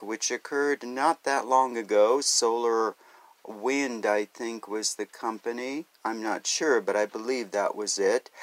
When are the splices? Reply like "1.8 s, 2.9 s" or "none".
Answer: none